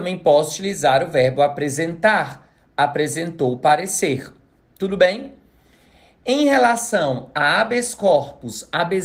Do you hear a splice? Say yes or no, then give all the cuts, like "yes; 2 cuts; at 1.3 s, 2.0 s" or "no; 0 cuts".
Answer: no; 0 cuts